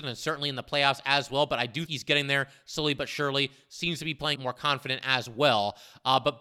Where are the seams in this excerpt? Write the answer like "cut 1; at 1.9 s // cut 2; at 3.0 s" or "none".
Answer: cut 1; at 1.9 s // cut 2; at 4.4 s